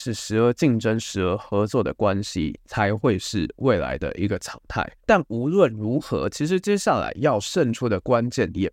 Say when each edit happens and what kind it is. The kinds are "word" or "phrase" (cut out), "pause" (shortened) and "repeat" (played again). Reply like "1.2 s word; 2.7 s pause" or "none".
5.0 s pause